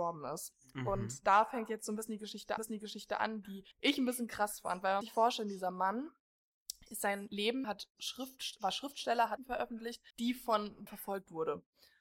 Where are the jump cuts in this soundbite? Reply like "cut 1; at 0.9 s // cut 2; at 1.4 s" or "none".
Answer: cut 1; at 2.6 s // cut 2; at 3.7 s // cut 3; at 5.0 s // cut 4; at 7.6 s // cut 5; at 9.4 s // cut 6; at 10.1 s // cut 7; at 10.9 s